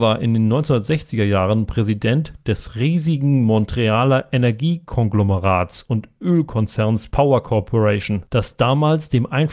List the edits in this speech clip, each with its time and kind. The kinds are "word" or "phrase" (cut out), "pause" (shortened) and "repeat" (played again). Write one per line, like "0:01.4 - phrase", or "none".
none